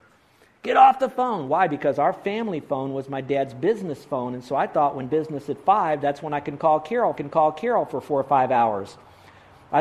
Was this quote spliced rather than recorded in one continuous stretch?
yes; 2 cuts; at 5.1 s, 7.1 s

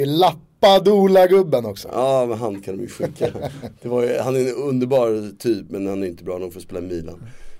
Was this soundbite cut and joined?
no; 0 cuts

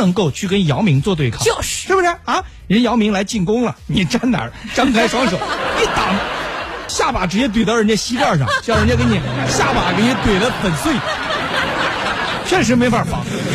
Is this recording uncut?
no; 1 cut; at 6.9 s

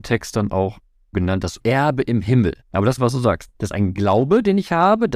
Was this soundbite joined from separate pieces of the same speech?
yes; 5 cuts; at 1.1 s, 1.6 s, 2.6 s, 3.0 s, 3.5 s

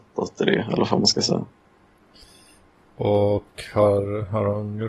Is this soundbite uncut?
yes; 0 cuts

